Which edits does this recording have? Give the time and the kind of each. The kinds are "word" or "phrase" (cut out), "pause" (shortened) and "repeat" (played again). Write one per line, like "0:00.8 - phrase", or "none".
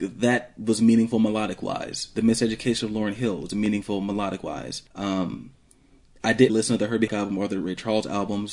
0:04.9 - pause
0:06.5 - word
0:07.1 - word